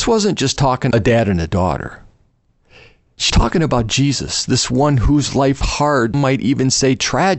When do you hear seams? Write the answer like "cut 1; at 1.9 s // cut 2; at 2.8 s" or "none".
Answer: cut 1; at 0.9 s // cut 2; at 3.3 s // cut 3; at 5.6 s // cut 4; at 6.1 s